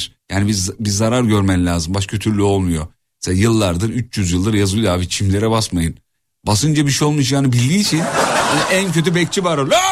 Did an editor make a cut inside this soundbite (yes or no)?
no